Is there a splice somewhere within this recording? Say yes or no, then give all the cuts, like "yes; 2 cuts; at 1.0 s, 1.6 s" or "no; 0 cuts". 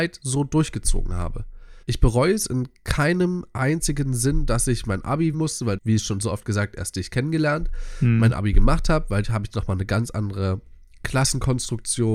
yes; 4 cuts; at 1.8 s, 5.3 s, 5.8 s, 9.2 s